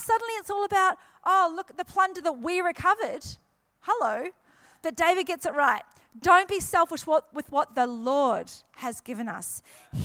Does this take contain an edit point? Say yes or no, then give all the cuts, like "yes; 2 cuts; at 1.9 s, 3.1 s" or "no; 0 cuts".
no; 0 cuts